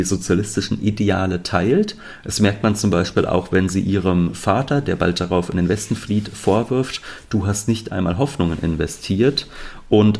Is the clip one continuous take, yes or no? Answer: yes